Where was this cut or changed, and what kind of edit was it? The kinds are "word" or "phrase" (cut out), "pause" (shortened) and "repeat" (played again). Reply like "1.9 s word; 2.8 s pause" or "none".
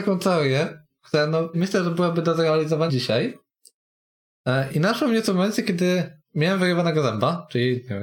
1.5 s word; 2.9 s word; 4.7 s word